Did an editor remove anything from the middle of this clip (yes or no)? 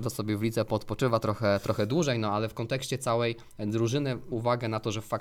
yes